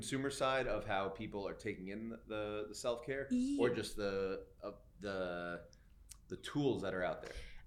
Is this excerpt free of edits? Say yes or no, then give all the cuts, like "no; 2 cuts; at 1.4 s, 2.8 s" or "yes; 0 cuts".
yes; 0 cuts